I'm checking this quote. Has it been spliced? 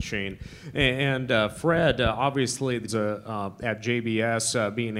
yes; 1 cut; at 2.9 s

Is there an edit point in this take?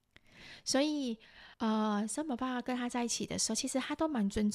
yes; 1 cut; at 1.5 s

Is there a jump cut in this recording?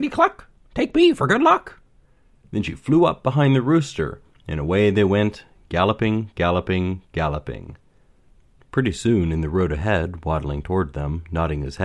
no; 0 cuts

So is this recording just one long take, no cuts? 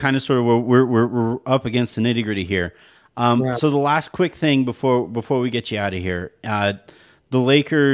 yes; 0 cuts

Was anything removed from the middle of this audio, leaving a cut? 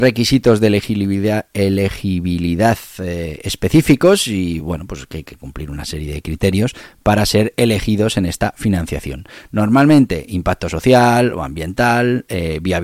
no; 0 cuts

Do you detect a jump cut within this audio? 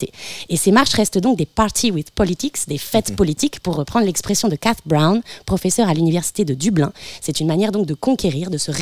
no; 0 cuts

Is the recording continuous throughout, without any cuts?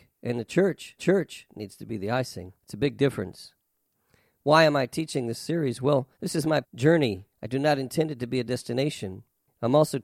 no; 5 cuts; at 1.0 s, 2.6 s, 6.1 s, 6.6 s, 7.3 s

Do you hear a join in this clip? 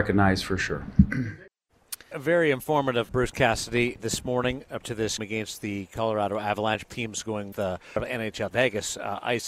yes; 9 cuts; at 2.1 s, 3.1 s, 4.0 s, 4.8 s, 5.2 s, 6.9 s, 7.5 s, 8.0 s, 8.5 s

